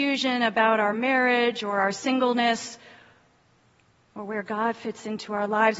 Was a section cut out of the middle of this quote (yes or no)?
no